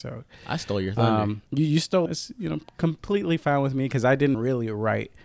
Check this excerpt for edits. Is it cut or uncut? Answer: cut